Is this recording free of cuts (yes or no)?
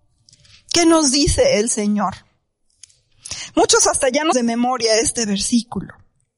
no